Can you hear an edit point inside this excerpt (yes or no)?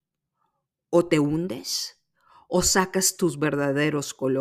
no